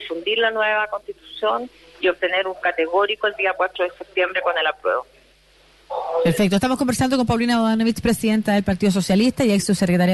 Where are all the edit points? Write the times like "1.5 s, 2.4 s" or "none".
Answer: 2.6 s